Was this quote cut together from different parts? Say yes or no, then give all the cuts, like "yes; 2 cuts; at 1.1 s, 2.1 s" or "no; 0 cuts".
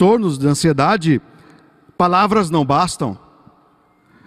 no; 0 cuts